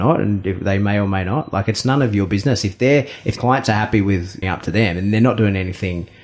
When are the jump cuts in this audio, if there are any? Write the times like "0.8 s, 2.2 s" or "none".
3.4 s, 4.4 s